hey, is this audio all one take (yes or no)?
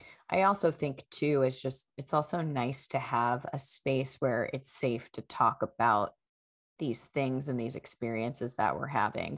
yes